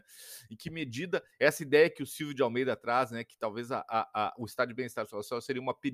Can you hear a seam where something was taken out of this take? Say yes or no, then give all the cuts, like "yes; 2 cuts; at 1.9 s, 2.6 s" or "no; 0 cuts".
no; 0 cuts